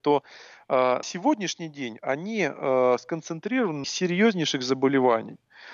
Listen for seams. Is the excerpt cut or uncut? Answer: cut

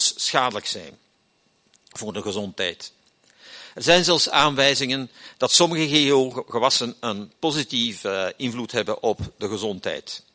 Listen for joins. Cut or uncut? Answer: uncut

